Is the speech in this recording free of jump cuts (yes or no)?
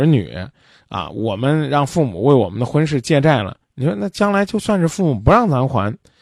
no